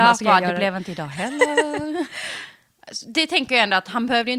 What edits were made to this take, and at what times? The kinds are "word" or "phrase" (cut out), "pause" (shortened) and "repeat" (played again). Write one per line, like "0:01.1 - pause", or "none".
none